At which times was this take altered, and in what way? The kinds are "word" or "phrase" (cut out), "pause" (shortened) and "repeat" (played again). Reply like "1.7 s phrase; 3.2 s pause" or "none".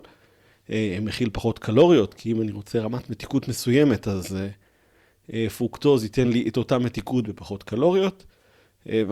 none